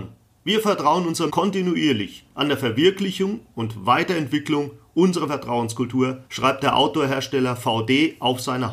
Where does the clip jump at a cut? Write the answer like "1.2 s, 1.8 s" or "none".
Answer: 1.3 s, 2.3 s, 6.3 s